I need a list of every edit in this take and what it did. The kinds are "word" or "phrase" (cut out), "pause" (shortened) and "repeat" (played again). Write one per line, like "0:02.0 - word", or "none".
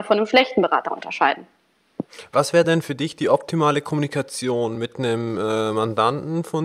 none